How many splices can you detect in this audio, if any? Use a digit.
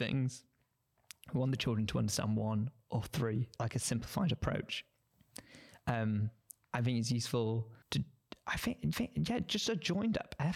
3